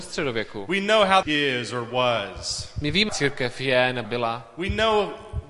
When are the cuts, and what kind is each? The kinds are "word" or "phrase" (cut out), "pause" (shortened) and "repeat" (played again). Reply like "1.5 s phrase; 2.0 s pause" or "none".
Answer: 1.2 s phrase; 3.1 s word; 4.0 s word